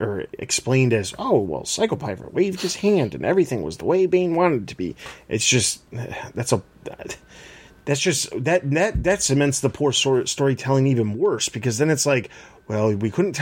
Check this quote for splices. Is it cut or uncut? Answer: uncut